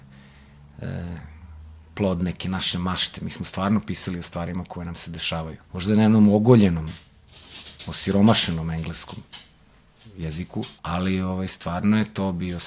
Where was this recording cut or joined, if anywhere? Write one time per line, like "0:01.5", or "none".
0:01.8
0:05.6
0:10.8